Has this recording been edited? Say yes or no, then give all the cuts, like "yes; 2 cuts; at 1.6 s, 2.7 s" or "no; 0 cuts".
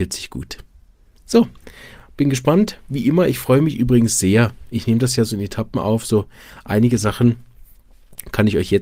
no; 0 cuts